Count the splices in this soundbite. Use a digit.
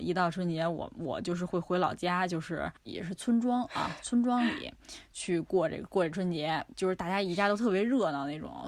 1